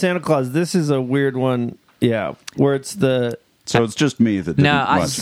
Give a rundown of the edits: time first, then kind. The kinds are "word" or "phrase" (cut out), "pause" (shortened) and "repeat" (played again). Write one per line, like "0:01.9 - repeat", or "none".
none